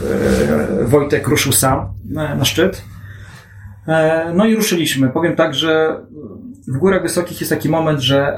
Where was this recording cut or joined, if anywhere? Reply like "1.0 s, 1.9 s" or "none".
6.6 s